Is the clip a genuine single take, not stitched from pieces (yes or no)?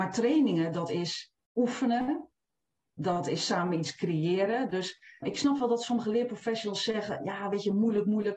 no